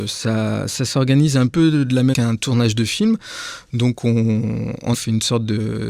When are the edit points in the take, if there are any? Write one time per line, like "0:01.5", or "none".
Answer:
0:01.5
0:02.1
0:04.9